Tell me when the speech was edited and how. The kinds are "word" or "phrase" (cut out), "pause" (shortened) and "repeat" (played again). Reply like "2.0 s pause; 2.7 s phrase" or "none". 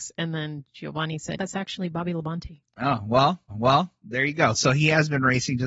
1.4 s word; 2.7 s pause; 3.5 s repeat